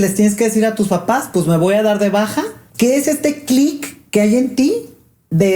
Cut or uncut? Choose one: uncut